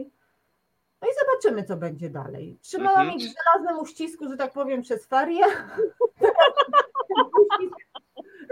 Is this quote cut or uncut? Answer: uncut